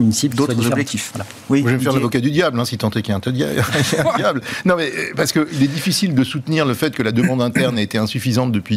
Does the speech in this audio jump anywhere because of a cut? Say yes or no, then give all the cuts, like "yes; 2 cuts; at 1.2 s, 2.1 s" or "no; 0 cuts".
no; 0 cuts